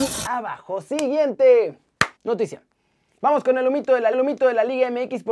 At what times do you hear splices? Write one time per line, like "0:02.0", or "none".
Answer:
0:02.2
0:04.1